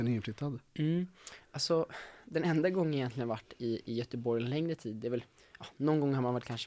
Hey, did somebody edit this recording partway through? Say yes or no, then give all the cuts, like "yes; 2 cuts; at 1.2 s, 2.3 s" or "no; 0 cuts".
no; 0 cuts